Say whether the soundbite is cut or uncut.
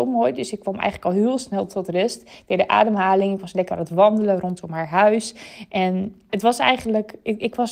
cut